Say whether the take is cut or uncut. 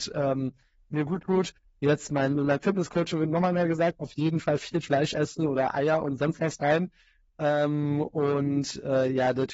uncut